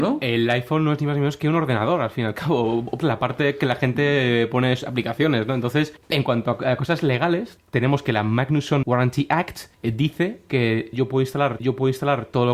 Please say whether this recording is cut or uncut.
cut